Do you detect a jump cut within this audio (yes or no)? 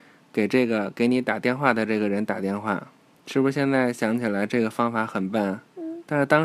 yes